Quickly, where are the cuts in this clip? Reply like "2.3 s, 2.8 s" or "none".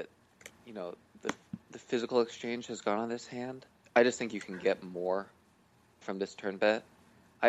3.7 s, 6.0 s